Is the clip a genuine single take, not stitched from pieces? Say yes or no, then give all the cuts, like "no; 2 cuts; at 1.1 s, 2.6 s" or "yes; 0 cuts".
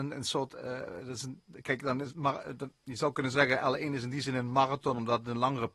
yes; 0 cuts